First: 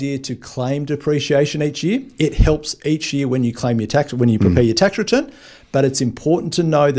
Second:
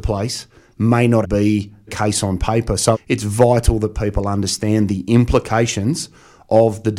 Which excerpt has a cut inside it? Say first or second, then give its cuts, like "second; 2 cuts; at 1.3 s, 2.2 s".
second; 3 cuts; at 1.2 s, 1.9 s, 2.9 s